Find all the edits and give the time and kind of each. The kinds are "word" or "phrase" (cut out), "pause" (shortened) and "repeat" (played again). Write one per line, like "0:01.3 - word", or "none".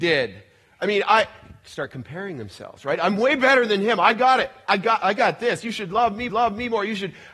0:06.3 - repeat